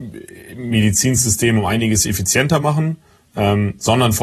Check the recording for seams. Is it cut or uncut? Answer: uncut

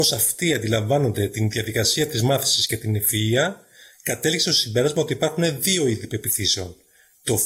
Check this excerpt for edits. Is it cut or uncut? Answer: uncut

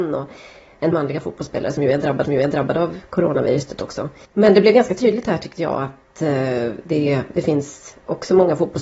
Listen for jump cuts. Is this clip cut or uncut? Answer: cut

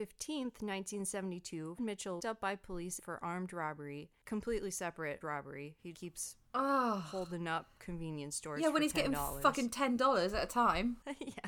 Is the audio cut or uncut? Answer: cut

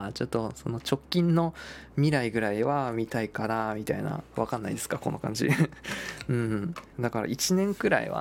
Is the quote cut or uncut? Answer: cut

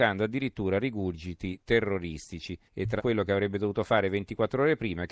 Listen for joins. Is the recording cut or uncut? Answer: cut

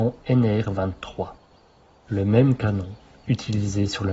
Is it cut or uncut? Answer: uncut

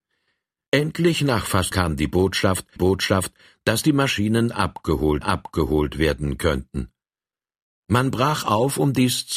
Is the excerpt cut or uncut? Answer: cut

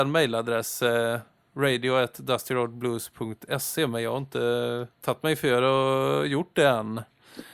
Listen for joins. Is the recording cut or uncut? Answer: cut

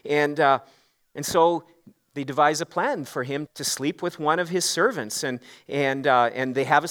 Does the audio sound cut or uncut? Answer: cut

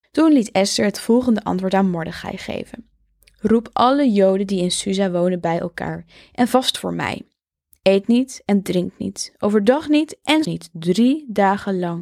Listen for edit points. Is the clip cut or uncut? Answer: cut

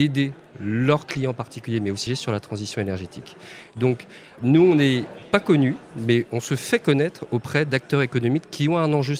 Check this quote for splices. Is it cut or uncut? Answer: cut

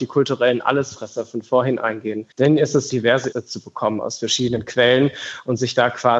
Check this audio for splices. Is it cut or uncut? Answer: cut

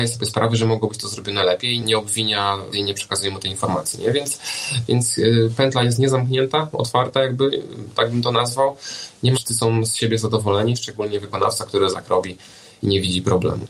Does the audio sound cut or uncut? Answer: cut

